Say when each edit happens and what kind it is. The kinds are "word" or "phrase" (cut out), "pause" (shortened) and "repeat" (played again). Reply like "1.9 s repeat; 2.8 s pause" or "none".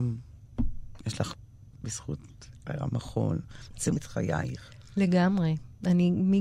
1.8 s word; 4.0 s word